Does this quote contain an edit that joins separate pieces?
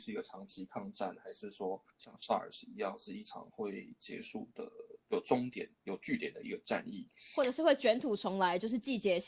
yes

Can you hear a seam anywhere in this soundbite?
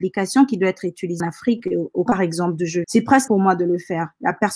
yes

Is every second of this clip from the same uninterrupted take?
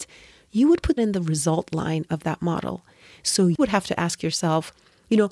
no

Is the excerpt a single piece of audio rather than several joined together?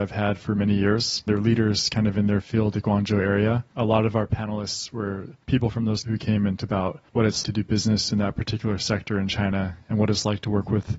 no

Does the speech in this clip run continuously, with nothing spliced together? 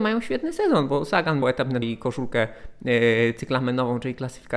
no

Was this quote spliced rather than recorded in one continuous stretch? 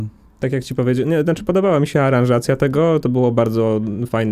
no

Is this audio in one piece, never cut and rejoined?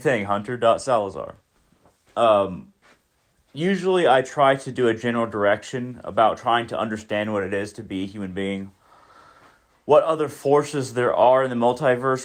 yes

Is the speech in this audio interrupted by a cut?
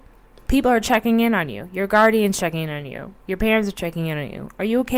no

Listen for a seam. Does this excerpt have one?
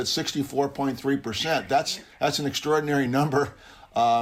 no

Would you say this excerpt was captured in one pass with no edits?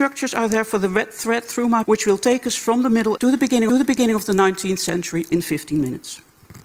no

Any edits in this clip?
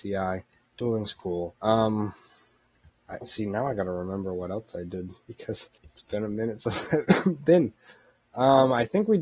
yes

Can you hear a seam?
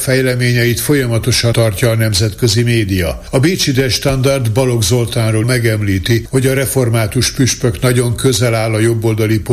yes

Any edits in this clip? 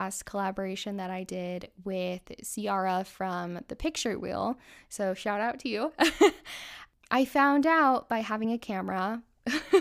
no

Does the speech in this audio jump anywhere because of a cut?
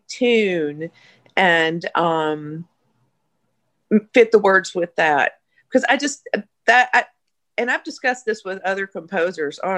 no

